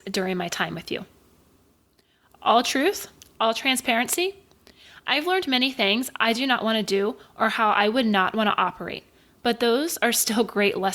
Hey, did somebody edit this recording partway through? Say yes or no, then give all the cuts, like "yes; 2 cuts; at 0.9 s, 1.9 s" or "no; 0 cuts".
no; 0 cuts